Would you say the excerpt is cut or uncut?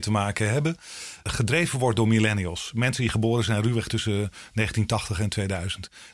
uncut